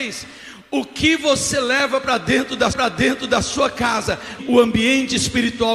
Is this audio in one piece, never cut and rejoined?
no; 2 cuts; at 2.7 s, 4.4 s

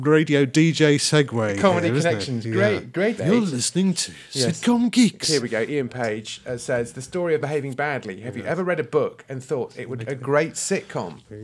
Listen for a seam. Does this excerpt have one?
yes; 3 cuts; at 3.2 s, 7.4 s, 10.0 s

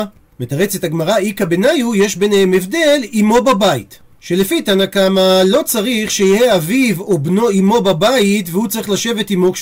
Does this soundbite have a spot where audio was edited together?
no; 0 cuts

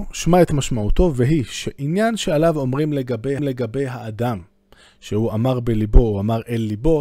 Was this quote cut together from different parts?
yes; 1 cut; at 3.4 s

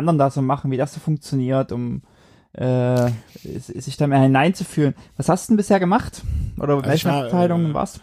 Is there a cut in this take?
no; 0 cuts

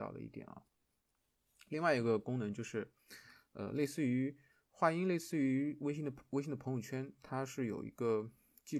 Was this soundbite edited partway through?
no; 0 cuts

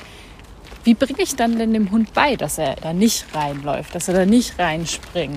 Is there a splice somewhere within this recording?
yes; 1 cut; at 2.8 s

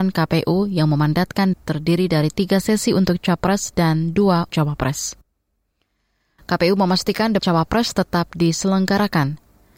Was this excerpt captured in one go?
no; 3 cuts; at 1.5 s, 4.5 s, 7.4 s

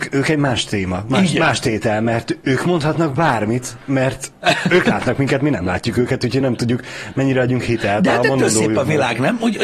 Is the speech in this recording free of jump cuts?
yes; 0 cuts

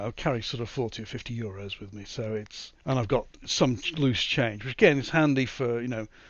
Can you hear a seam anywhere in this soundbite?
yes; 2 cuts; at 2.8 s, 3.3 s

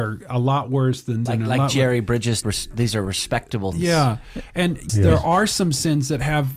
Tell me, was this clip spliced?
yes; 4 cuts; at 1.3 s, 2.4 s, 3.7 s, 4.9 s

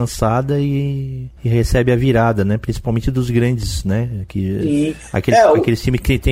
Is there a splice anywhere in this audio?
yes; 1 cut; at 1.4 s

